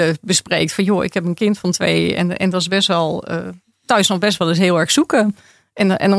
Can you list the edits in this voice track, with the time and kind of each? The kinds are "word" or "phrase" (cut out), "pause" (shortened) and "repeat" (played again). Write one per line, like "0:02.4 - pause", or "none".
none